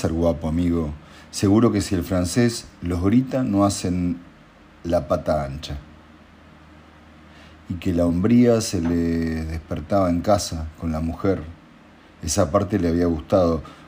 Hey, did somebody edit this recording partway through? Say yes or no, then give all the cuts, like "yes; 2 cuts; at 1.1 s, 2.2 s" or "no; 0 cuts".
no; 0 cuts